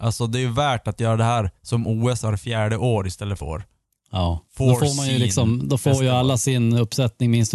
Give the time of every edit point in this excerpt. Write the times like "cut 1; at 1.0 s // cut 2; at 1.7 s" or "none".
cut 1; at 3.4 s // cut 2; at 4.5 s